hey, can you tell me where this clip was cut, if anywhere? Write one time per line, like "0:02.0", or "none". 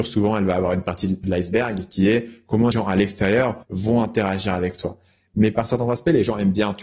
0:01.2
0:02.7
0:03.6